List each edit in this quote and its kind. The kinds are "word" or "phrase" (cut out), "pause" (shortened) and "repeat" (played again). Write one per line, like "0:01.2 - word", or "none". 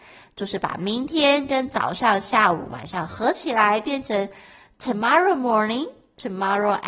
none